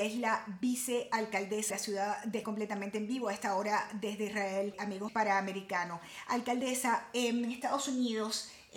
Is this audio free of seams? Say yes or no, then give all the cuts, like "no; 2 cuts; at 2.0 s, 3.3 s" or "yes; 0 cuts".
no; 3 cuts; at 1.7 s, 2.4 s, 5.1 s